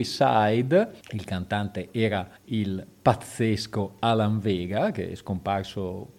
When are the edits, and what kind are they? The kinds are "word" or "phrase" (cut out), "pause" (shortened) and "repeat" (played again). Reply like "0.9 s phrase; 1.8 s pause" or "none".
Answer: 1.0 s pause; 2.4 s pause